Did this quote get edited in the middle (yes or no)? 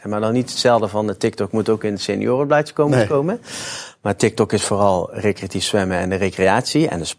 no